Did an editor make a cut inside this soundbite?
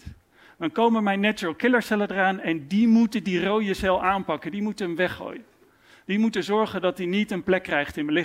no; 0 cuts

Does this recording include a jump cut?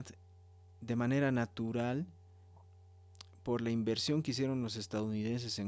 no; 0 cuts

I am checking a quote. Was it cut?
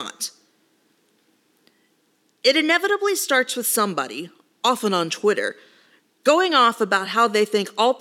no; 0 cuts

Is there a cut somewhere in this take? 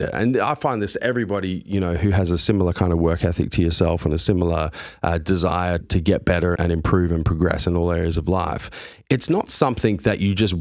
yes; 2 cuts; at 5.8 s, 6.6 s

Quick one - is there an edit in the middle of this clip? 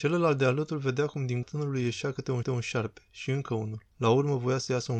yes; 3 cuts; at 1.4 s, 2.4 s, 3.9 s

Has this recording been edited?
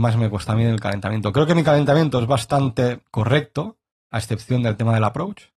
no; 0 cuts

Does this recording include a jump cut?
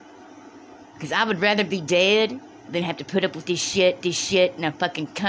yes; 1 cut; at 4.0 s

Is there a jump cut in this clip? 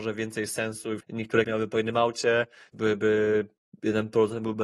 yes; 3 cuts; at 1.0 s, 1.4 s, 2.7 s

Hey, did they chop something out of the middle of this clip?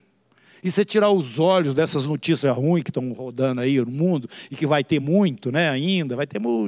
no; 0 cuts

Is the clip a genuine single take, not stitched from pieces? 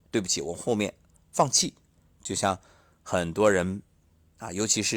yes; 0 cuts

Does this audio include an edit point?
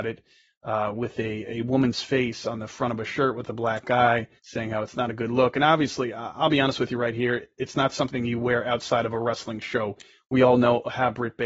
yes; 1 cut; at 4.4 s

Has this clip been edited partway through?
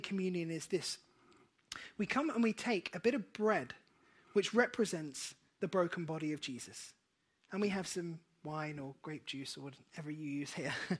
no; 0 cuts

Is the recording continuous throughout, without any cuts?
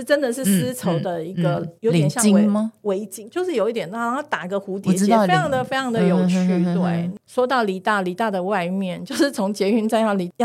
no; 1 cut; at 1.8 s

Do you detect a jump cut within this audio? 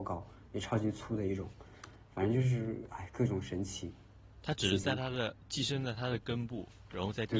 no; 0 cuts

